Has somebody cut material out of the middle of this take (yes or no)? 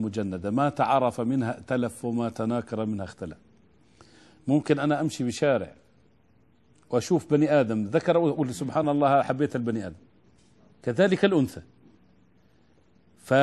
no